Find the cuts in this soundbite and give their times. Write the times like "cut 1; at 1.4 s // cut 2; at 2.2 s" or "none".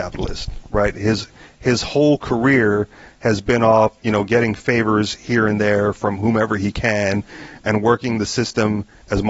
none

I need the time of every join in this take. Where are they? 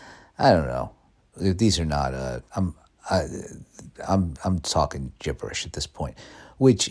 cut 1; at 2.5 s // cut 2; at 4.0 s

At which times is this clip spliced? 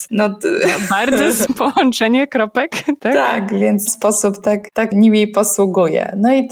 cut 1; at 1.5 s // cut 2; at 3.0 s // cut 3; at 3.9 s // cut 4; at 4.9 s

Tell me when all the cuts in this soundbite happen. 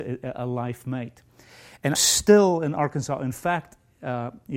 cut 1; at 1.9 s

